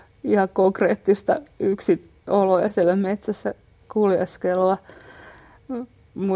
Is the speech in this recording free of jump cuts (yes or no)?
yes